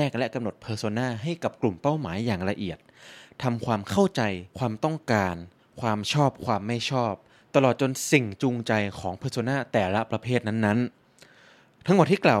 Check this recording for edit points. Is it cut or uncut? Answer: uncut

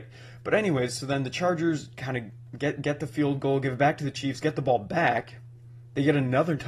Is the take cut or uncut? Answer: uncut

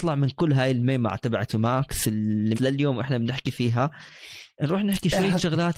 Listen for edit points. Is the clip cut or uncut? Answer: cut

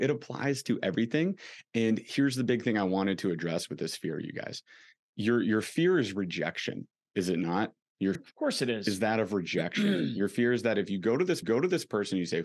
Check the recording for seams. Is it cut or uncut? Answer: cut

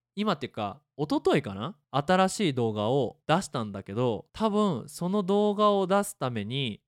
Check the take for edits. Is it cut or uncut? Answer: cut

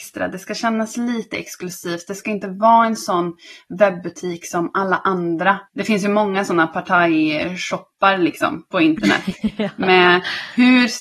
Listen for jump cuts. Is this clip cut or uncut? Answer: cut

